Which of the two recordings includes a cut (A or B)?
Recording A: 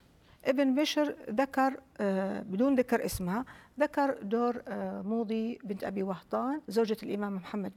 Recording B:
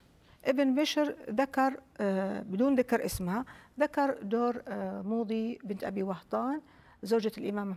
A